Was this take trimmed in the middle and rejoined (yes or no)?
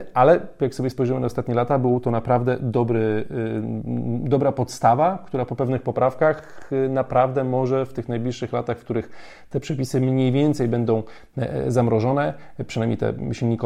no